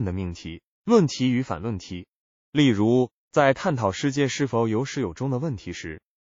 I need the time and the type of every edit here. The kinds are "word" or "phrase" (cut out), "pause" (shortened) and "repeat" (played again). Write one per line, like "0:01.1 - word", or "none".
none